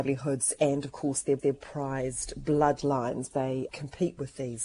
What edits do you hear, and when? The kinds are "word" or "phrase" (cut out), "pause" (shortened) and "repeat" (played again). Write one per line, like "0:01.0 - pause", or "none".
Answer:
0:01.4 - repeat
0:03.3 - word
0:03.7 - word